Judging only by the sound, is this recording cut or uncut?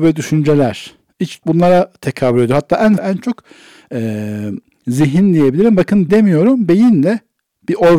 cut